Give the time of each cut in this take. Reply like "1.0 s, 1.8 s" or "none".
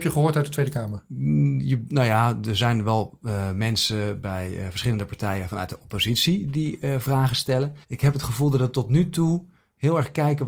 7.8 s